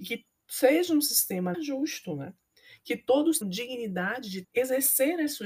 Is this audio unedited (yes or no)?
no